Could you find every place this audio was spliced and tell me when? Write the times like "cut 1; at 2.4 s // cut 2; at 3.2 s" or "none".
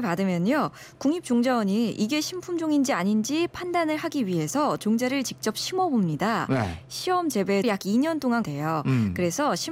cut 1; at 7.6 s // cut 2; at 8.4 s